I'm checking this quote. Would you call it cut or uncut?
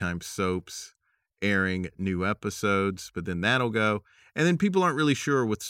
uncut